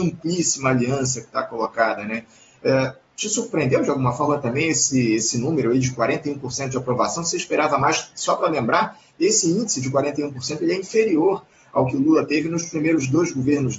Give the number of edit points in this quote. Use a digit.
0